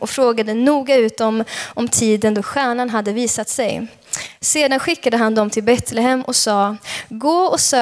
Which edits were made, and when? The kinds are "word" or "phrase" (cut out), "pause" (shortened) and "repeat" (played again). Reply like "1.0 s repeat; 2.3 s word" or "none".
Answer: none

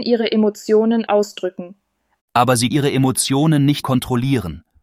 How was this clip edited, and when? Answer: 1.1 s word; 2.7 s word; 3.8 s word

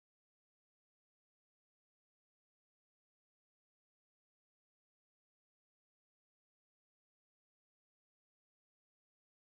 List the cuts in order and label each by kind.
none

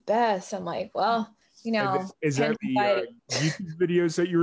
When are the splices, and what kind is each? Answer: 1.4 s pause; 2.1 s pause; 2.6 s word; 3.2 s pause

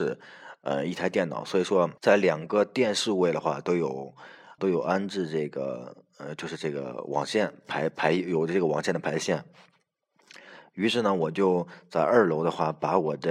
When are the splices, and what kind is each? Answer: 2.0 s pause; 4.6 s word

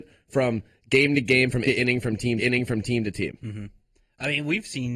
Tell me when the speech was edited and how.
1.7 s word; 2.4 s repeat

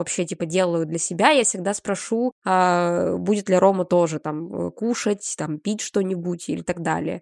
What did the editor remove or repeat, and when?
none

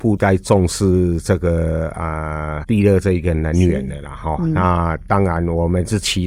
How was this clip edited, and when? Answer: 2.6 s word

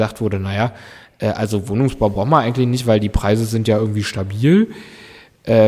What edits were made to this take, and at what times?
none

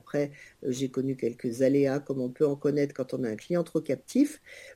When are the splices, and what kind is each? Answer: none

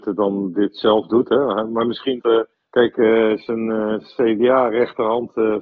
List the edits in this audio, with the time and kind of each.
2.2 s word; 2.5 s pause

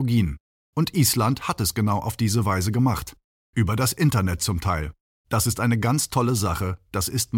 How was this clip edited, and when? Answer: none

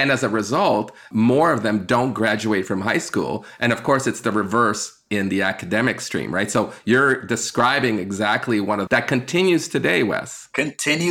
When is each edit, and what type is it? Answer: 8.9 s phrase

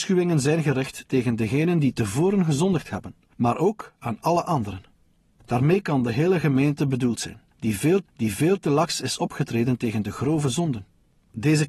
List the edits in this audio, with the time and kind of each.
8.0 s repeat

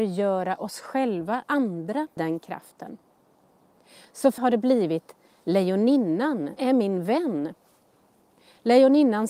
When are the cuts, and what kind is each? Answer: 1.5 s word; 2.2 s word; 4.4 s word; 6.6 s word

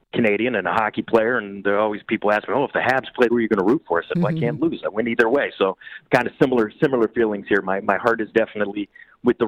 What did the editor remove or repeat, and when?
3.3 s phrase

